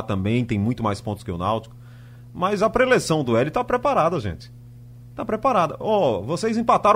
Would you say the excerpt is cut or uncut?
uncut